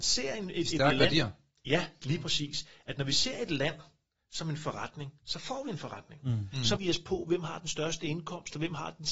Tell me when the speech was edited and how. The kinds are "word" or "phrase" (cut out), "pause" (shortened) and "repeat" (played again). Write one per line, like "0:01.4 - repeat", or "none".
0:06.8 - word